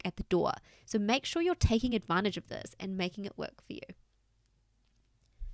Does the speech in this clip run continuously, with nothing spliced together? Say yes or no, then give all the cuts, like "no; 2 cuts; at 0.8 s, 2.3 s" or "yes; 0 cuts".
yes; 0 cuts